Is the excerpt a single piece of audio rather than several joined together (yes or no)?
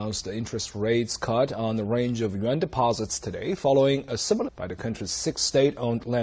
no